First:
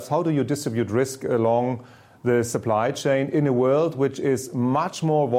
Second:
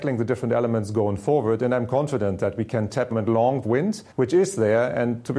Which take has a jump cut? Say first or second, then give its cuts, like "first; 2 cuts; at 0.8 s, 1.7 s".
second; 3 cuts; at 3.1 s, 3.6 s, 4.1 s